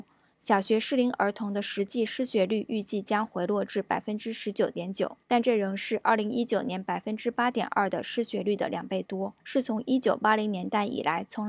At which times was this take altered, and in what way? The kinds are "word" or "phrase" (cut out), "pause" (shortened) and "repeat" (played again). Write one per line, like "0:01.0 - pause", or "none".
0:05.2 - pause
0:09.4 - pause

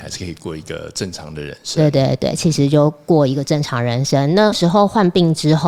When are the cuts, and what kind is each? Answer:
none

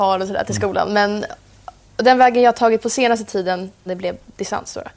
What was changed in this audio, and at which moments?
0:03.9 - word

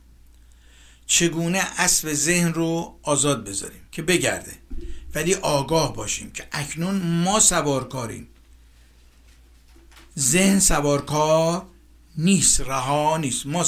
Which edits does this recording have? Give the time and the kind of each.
0:03.9 - pause

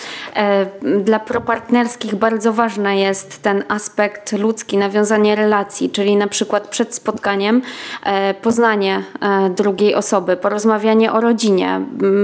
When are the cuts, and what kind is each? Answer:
none

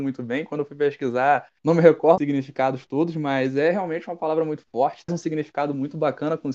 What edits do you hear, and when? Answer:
0:01.6 - pause
0:02.2 - word
0:05.1 - word

